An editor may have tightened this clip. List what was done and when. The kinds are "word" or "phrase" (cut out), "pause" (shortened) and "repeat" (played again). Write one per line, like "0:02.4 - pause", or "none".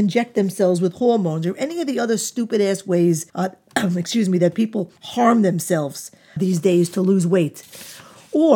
0:03.3 - pause
0:05.0 - pause
0:06.4 - word